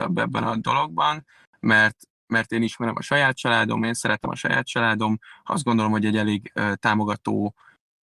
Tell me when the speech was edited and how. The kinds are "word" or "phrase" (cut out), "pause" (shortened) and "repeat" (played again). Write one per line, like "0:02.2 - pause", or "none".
0:02.1 - pause